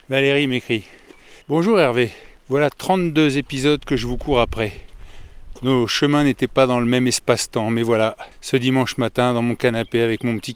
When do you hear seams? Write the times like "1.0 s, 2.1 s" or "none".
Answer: 1.4 s, 2.4 s, 8.3 s